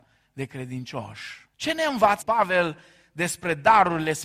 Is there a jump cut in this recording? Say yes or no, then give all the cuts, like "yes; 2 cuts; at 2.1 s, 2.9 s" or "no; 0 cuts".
yes; 2 cuts; at 1.5 s, 2.2 s